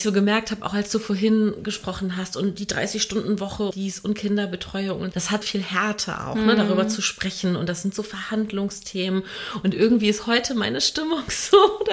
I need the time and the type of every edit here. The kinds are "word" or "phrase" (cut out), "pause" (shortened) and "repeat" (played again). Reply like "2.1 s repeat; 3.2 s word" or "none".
3.7 s word; 5.1 s word; 5.4 s word